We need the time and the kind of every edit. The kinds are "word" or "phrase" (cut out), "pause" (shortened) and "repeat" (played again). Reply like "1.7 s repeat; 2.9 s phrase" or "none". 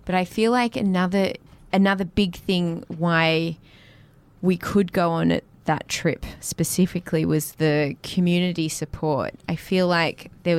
none